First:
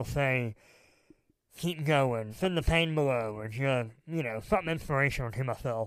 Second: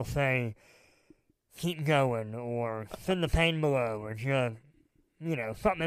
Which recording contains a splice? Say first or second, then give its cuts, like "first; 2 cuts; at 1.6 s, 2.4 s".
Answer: first; 2 cuts; at 2.3 s, 4.0 s